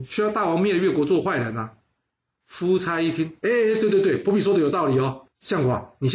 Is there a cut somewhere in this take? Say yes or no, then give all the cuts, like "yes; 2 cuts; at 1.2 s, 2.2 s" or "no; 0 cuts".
no; 0 cuts